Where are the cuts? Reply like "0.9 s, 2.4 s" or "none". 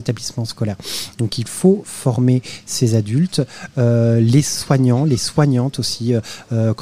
none